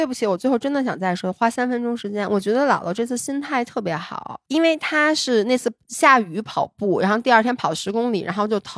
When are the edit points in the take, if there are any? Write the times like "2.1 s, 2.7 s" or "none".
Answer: 4.4 s